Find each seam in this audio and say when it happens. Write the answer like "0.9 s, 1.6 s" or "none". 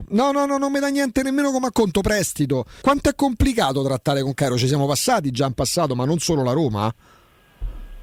2.8 s